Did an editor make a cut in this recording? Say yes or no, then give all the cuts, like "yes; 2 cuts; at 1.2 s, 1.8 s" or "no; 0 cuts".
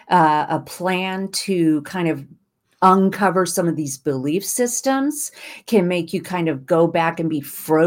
no; 0 cuts